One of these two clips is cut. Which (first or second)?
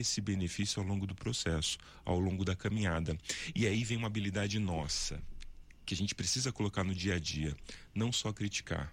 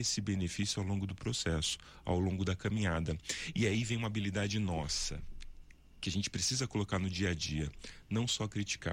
first